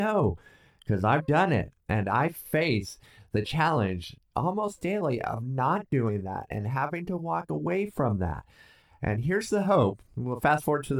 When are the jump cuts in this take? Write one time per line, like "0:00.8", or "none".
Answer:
none